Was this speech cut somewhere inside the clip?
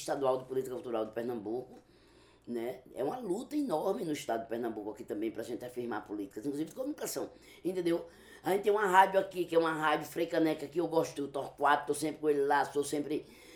yes; 1 cut; at 11.2 s

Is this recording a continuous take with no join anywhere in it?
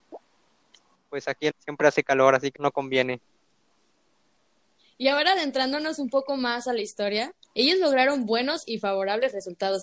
no; 2 cuts; at 1.5 s, 2.6 s

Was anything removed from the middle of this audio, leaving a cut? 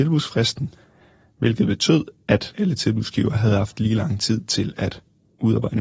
no; 0 cuts

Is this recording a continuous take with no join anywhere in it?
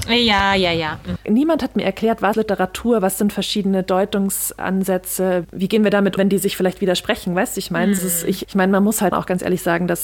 no; 6 cuts; at 2.3 s, 5.4 s, 6.2 s, 8.0 s, 8.4 s, 9.1 s

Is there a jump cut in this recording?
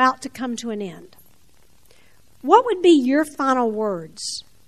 no; 0 cuts

